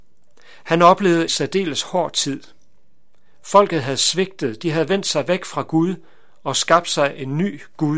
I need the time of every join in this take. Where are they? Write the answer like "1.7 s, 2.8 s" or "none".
1.3 s